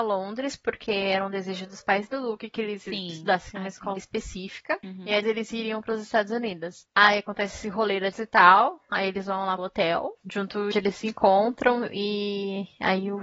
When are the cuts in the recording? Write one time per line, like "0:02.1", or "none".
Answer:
0:04.0
0:05.2
0:08.1
0:09.6
0:10.2
0:10.7